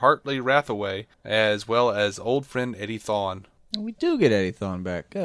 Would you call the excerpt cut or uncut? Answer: uncut